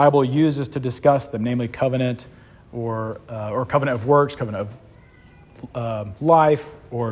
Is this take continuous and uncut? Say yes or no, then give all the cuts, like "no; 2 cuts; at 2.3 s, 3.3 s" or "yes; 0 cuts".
yes; 0 cuts